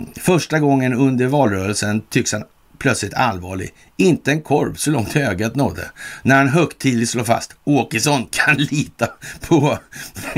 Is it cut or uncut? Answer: uncut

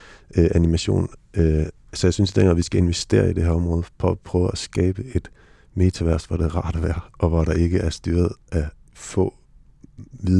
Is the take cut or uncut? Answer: cut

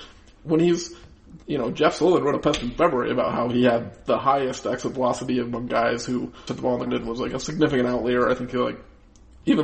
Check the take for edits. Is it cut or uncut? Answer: cut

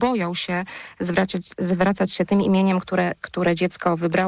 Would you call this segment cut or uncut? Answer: uncut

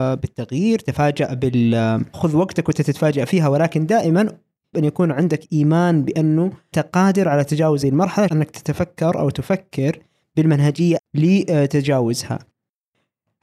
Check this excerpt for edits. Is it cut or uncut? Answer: cut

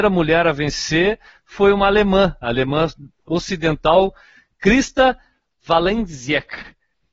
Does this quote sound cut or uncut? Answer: uncut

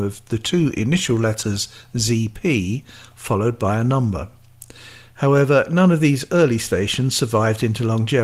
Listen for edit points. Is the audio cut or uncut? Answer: uncut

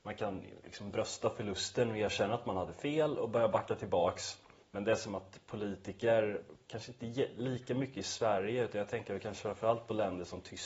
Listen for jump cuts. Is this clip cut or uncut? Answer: cut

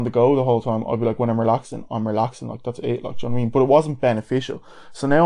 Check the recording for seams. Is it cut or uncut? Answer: uncut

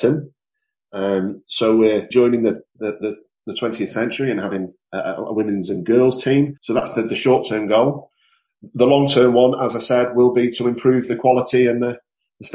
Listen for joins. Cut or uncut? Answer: cut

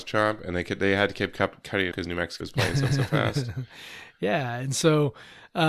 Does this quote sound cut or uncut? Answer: cut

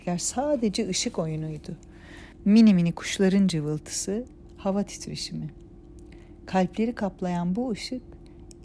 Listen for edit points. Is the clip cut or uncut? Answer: uncut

